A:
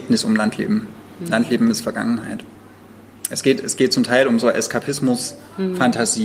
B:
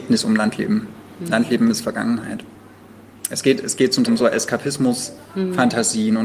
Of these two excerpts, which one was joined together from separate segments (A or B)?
B